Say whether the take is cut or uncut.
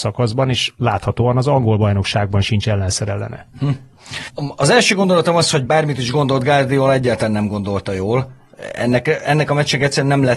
uncut